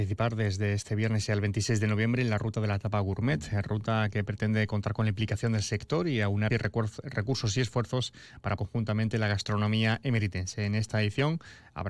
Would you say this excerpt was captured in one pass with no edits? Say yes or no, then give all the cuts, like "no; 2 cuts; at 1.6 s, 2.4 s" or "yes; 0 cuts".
no; 2 cuts; at 6.5 s, 8.6 s